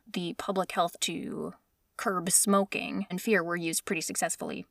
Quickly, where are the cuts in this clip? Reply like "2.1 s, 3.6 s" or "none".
1.0 s, 3.1 s